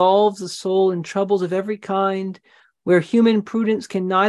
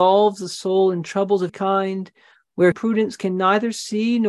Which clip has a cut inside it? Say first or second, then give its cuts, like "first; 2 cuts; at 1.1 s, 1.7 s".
second; 2 cuts; at 1.5 s, 2.7 s